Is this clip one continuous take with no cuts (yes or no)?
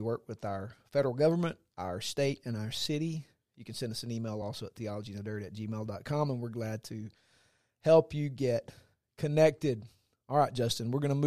yes